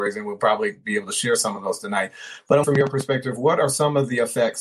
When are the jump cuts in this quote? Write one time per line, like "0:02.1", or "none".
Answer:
0:02.6